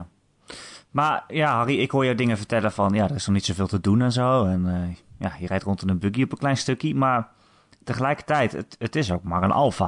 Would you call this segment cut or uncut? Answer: uncut